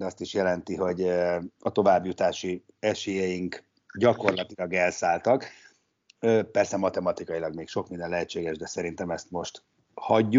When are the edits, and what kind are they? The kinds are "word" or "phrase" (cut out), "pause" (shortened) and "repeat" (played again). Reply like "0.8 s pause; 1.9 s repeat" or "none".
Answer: none